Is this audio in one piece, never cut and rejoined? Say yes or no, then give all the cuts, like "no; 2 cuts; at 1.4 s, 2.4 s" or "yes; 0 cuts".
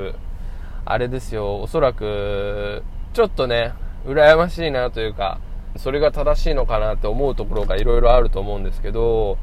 no; 1 cut; at 5.8 s